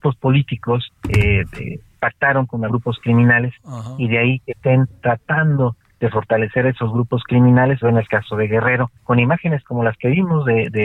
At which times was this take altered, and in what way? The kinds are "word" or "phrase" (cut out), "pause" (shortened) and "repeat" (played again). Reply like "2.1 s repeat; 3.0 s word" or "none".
1.0 s pause; 2.7 s word; 4.5 s word; 7.8 s word; 9.0 s pause